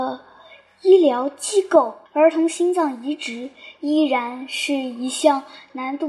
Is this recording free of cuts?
no; 1 cut; at 2.1 s

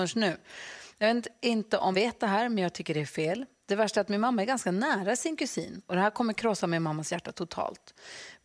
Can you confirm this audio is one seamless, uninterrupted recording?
no; 1 cut; at 1.9 s

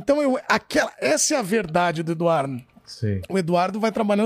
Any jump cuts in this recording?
no; 0 cuts

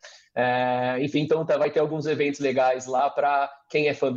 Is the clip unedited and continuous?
yes; 0 cuts

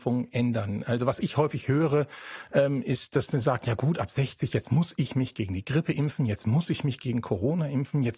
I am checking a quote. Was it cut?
no; 0 cuts

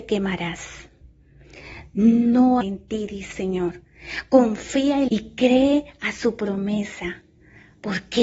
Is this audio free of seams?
no; 3 cuts; at 2.6 s, 3.3 s, 5.1 s

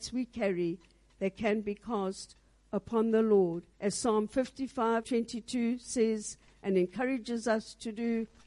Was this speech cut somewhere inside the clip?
yes; 2 cuts; at 3.7 s, 5.0 s

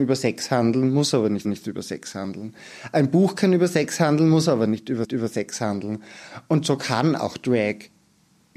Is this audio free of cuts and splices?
no; 2 cuts; at 1.4 s, 5.0 s

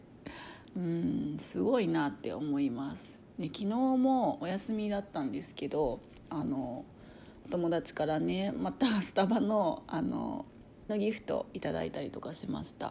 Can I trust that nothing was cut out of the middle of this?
no; 1 cut; at 10.9 s

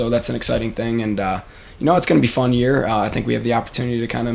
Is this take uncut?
yes; 0 cuts

